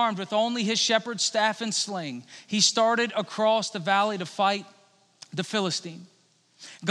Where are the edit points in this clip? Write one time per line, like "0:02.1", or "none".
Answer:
none